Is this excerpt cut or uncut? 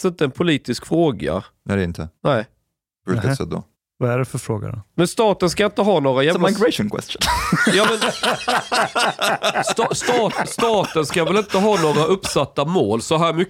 cut